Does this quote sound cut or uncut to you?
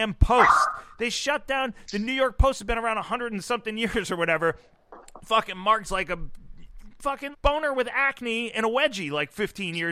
cut